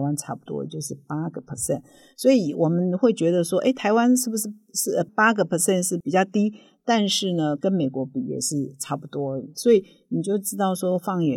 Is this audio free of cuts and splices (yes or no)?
yes